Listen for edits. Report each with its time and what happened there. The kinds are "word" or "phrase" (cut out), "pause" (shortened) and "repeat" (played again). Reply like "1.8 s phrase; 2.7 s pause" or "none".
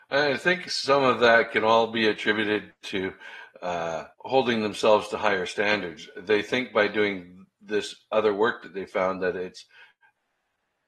4.1 s pause